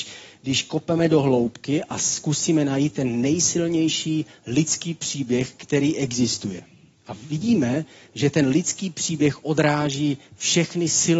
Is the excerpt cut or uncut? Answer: uncut